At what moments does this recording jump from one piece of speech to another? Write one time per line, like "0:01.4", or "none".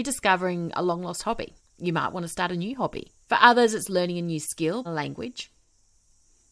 0:01.6
0:03.2
0:04.8